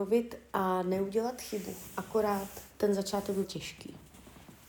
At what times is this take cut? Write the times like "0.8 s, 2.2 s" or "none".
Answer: 2.7 s, 3.4 s